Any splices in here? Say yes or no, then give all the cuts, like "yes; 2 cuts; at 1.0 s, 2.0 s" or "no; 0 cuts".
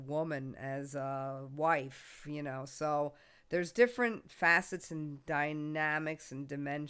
no; 0 cuts